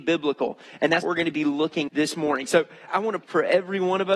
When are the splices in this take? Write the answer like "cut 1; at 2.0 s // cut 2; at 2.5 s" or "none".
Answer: cut 1; at 1.0 s // cut 2; at 1.9 s // cut 3; at 2.9 s // cut 4; at 3.2 s